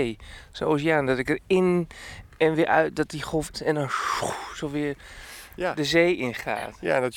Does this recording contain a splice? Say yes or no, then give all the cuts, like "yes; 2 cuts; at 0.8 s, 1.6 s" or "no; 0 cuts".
yes; 1 cut; at 3.5 s